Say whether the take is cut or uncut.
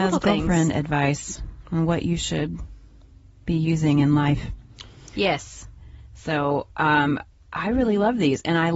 uncut